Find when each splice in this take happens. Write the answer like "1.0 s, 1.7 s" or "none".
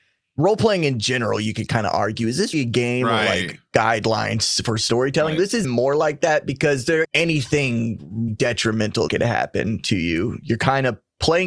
2.5 s, 5.6 s, 7.0 s, 8.3 s, 9.1 s